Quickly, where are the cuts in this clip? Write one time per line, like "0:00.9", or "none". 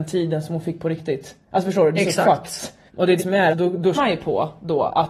0:01.4
0:01.9
0:02.9
0:03.2
0:03.5
0:03.9